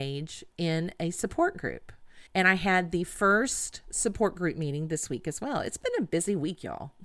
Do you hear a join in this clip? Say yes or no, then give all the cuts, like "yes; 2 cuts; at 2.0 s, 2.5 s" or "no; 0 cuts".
yes; 1 cut; at 2.3 s